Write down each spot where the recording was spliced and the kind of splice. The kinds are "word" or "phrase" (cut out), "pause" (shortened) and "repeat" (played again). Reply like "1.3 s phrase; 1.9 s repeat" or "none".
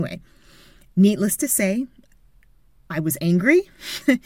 none